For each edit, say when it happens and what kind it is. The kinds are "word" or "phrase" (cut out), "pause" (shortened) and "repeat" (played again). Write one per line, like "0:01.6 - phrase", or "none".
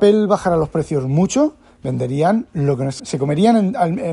0:03.0 - word